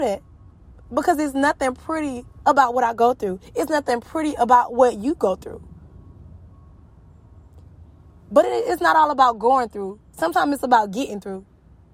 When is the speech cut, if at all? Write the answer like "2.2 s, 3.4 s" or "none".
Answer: none